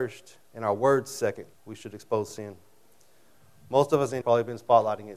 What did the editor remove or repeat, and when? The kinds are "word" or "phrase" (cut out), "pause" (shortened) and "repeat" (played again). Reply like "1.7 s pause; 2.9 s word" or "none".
1.5 s pause; 4.2 s word